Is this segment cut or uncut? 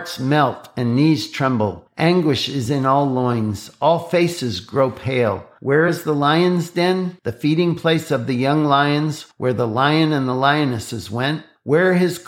uncut